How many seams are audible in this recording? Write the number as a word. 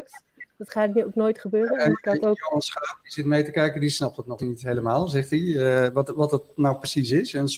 one